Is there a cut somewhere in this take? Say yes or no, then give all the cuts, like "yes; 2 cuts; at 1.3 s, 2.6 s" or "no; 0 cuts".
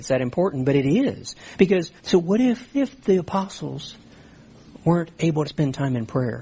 yes; 3 cuts; at 2.0 s, 2.7 s, 5.4 s